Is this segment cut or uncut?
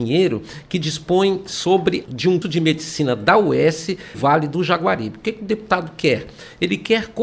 cut